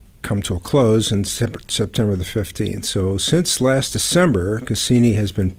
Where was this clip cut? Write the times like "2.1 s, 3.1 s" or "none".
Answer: none